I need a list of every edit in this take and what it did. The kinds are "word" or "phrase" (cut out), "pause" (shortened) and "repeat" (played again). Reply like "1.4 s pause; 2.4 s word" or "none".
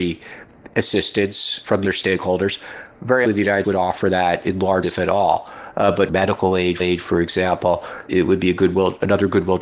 1.8 s word; 3.2 s word; 3.6 s word; 4.8 s word; 6.1 s phrase; 6.8 s repeat; 8.1 s word